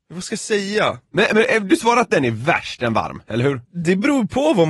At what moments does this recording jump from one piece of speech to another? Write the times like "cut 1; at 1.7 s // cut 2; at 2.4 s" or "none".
cut 1; at 3.6 s